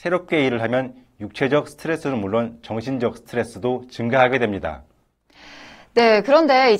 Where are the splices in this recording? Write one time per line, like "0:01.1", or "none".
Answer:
none